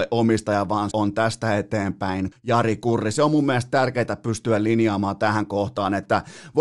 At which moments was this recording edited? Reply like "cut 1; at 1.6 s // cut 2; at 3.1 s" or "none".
cut 1; at 0.9 s // cut 2; at 2.3 s